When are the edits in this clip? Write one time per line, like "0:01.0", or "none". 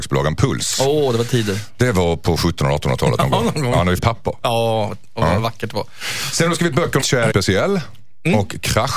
0:04.0
0:07.0
0:07.3